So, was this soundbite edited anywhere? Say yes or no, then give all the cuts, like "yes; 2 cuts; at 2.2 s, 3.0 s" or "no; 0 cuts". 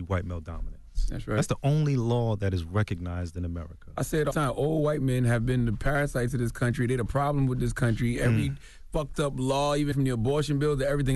yes; 2 cuts; at 4.3 s, 9.9 s